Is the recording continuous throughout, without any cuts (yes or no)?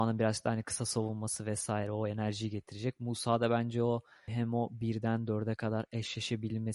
yes